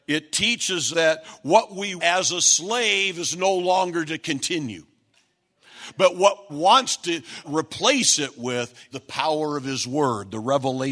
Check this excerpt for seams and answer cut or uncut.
cut